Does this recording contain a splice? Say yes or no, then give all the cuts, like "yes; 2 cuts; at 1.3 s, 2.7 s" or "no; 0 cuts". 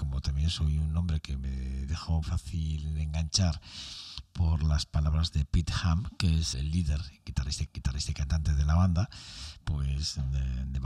yes; 3 cuts; at 2.2 s, 6.5 s, 7.7 s